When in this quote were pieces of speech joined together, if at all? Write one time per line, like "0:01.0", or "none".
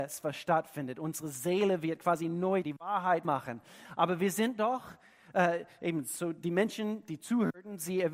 0:02.6
0:03.2